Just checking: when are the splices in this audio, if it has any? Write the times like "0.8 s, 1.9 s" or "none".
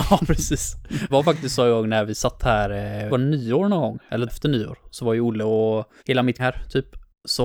1.1 s, 3.1 s, 4.3 s, 6.0 s, 6.4 s